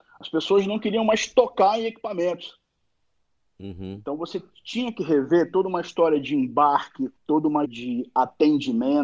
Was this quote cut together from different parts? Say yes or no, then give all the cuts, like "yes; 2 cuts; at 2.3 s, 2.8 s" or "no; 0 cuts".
yes; 2 cuts; at 7.2 s, 7.7 s